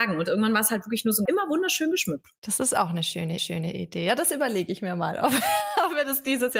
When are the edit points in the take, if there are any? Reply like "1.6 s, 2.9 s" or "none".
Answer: 1.3 s, 3.4 s

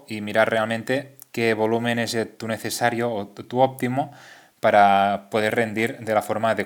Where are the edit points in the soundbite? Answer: none

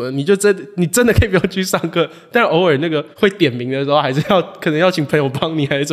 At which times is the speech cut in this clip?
3.1 s

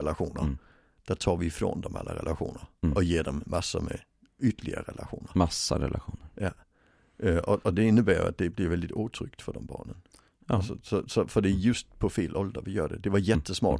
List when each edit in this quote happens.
none

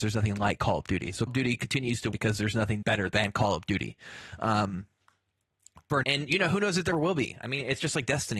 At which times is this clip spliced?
1.3 s, 2.1 s, 2.8 s, 6.0 s, 6.9 s

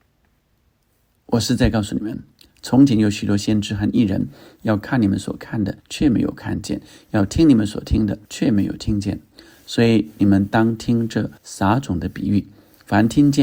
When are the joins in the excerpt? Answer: 5.8 s, 8.2 s, 11.4 s

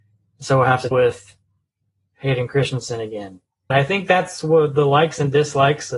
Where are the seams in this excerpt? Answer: 0.9 s, 3.7 s

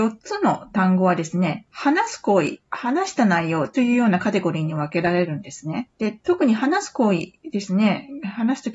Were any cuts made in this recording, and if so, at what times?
1.7 s, 2.6 s, 5.9 s, 7.4 s

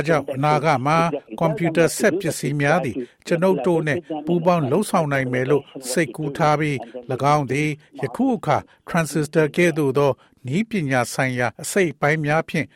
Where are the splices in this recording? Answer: 11.5 s

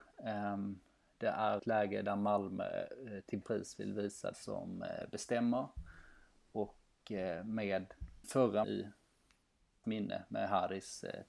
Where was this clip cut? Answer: 1.6 s, 3.4 s, 4.3 s, 8.2 s, 8.6 s, 9.8 s

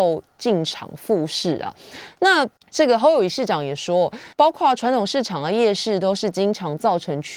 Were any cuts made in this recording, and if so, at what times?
2.6 s, 4.3 s

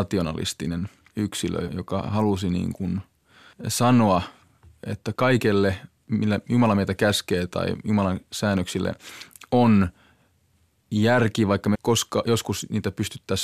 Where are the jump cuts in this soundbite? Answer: 1.7 s, 11.7 s

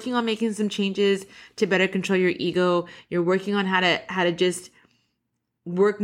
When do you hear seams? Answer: none

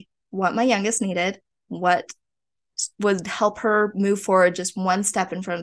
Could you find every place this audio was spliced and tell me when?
none

